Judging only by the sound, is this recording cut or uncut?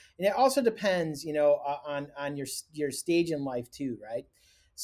uncut